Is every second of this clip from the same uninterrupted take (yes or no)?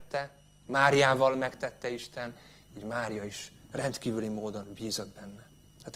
yes